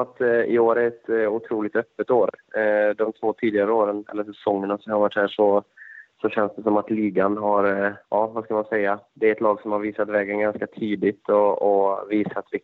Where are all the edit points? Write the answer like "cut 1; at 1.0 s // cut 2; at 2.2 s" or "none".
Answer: cut 1; at 8.0 s